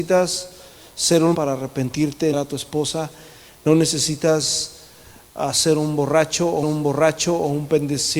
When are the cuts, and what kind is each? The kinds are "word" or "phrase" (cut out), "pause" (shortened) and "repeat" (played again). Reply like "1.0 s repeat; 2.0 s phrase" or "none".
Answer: 1.3 s word; 2.3 s phrase; 6.6 s repeat